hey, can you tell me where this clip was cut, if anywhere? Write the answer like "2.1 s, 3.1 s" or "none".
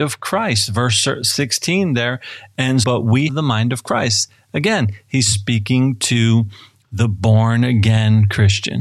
2.8 s, 3.3 s